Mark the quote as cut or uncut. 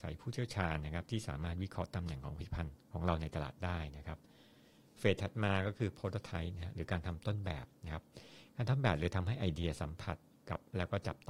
uncut